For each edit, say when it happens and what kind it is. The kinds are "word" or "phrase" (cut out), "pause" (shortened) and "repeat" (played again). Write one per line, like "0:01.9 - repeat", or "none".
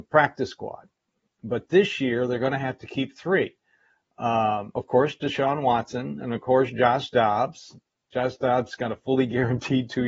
none